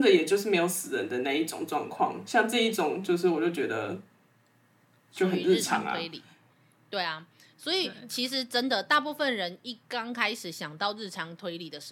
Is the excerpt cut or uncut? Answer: uncut